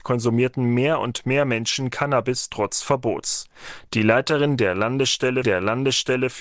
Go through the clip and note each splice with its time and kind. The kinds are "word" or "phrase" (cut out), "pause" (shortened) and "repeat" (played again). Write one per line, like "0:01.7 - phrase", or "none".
0:05.4 - repeat